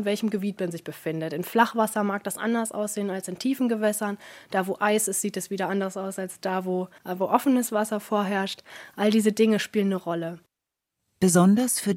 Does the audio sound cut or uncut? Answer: cut